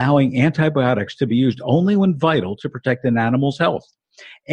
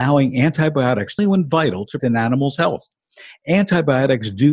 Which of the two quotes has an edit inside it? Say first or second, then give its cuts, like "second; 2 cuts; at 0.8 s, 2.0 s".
second; 2 cuts; at 1.2 s, 2.0 s